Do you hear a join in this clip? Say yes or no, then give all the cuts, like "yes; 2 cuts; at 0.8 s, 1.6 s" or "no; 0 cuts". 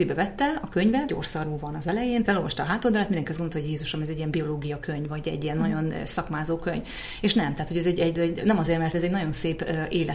yes; 4 cuts; at 1.1 s, 2.3 s, 8.2 s, 8.9 s